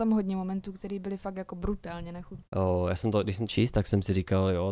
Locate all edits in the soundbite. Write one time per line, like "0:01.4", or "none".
0:03.5